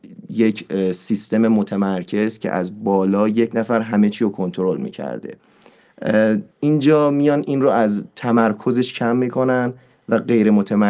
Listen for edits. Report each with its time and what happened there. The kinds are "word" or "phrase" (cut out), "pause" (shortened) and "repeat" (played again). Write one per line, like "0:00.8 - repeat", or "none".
0:06.5 - pause
0:08.1 - pause